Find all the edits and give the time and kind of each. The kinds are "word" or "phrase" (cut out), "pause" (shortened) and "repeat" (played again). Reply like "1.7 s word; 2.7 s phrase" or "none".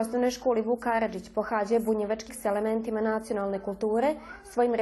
2.3 s word